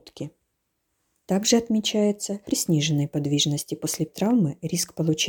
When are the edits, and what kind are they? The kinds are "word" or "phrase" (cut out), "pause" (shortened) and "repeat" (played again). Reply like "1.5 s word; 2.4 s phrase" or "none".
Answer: 2.5 s phrase; 4.1 s word